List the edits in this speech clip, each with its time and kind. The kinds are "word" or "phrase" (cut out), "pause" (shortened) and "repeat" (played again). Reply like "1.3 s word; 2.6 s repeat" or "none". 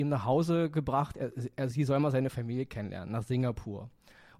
1.7 s word